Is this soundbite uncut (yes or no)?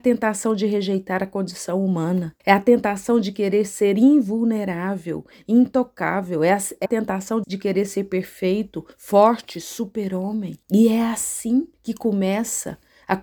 no